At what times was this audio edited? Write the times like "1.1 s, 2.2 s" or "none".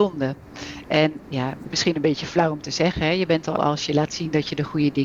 1.2 s, 1.7 s, 3.6 s